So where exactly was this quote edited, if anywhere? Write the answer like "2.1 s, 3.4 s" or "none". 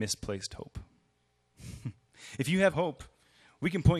2.7 s